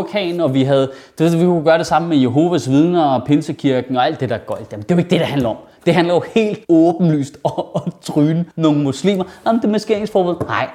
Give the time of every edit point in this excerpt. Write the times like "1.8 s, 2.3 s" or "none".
6.6 s, 8.5 s